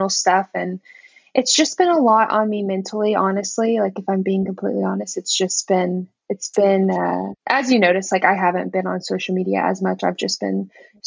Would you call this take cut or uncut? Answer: cut